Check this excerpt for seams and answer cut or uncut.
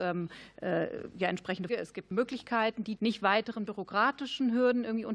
cut